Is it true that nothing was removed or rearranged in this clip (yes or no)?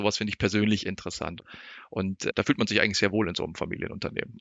no